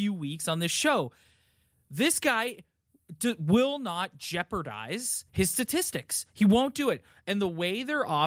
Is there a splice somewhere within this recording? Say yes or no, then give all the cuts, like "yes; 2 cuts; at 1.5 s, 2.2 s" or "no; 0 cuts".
yes; 1 cut; at 5.3 s